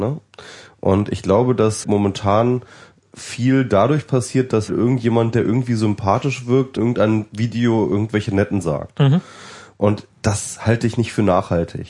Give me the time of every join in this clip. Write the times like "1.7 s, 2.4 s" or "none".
1.8 s, 3.0 s, 4.7 s, 6.8 s, 8.6 s, 10.1 s